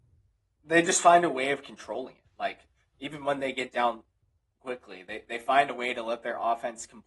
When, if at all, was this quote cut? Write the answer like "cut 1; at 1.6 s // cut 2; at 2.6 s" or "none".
cut 1; at 2.3 s